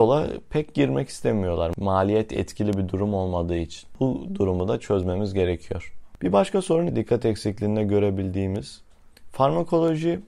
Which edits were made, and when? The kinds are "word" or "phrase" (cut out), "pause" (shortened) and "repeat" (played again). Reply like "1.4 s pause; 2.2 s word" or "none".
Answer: 6.9 s word